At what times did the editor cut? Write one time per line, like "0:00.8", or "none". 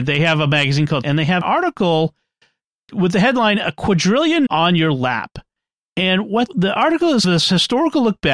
0:01.0
0:01.4
0:04.5
0:06.5
0:07.2